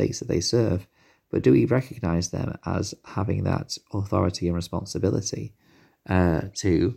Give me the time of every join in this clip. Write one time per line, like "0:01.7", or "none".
none